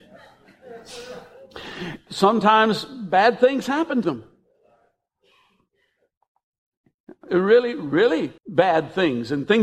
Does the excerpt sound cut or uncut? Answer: cut